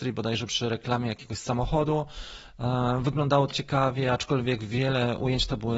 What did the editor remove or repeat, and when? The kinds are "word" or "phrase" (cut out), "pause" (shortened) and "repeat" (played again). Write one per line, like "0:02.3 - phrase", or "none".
0:03.5 - word